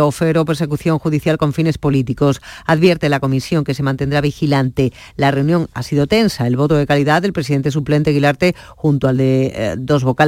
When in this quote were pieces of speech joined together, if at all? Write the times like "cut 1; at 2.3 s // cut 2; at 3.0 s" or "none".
cut 1; at 8.0 s